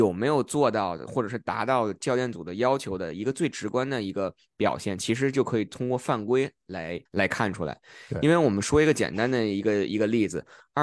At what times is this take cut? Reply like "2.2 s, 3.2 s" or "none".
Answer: 7.1 s